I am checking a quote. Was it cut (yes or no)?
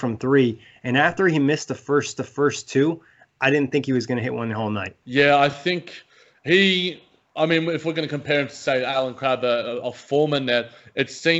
yes